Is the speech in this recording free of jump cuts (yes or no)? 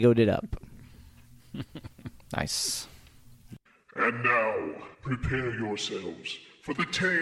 no